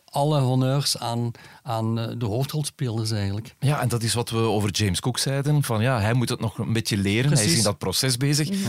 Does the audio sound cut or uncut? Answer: uncut